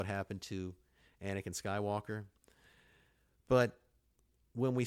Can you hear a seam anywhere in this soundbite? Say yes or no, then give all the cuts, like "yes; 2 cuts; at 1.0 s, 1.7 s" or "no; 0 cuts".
no; 0 cuts